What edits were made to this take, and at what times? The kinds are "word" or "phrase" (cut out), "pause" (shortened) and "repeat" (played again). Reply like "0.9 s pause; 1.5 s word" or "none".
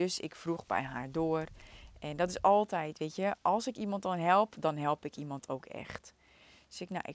none